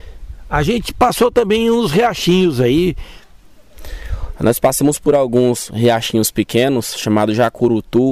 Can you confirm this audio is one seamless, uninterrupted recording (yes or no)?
yes